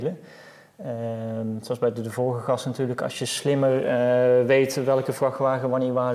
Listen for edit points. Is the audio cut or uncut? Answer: uncut